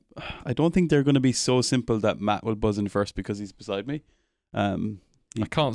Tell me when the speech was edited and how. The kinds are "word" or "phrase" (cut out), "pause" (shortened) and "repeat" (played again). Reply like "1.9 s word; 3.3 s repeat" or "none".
none